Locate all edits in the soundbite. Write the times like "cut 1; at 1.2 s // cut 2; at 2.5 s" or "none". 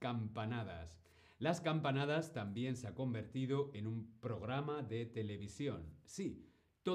none